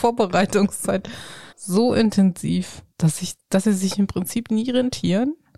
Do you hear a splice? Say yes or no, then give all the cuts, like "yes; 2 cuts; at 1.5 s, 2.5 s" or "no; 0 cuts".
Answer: yes; 2 cuts; at 1.5 s, 2.9 s